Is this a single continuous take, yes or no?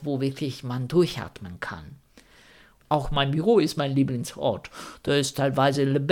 yes